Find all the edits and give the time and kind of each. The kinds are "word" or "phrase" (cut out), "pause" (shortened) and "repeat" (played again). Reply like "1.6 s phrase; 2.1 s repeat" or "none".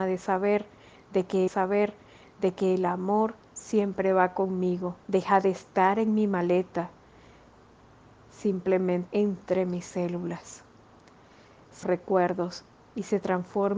1.5 s repeat; 5.0 s pause; 9.1 s word; 11.8 s phrase